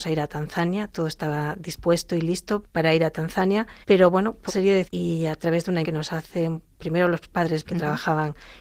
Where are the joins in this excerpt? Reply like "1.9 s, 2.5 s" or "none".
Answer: 2.6 s, 3.8 s, 4.5 s, 4.8 s, 5.8 s, 7.6 s